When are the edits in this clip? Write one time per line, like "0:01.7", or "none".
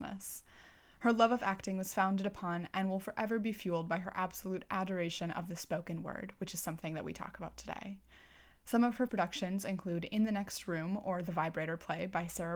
0:09.1